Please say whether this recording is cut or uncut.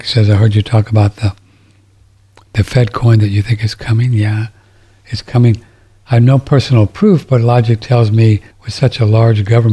cut